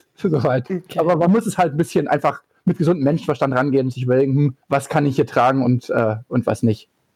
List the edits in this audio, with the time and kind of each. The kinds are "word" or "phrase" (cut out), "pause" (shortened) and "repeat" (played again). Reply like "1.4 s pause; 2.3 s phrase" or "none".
4.6 s pause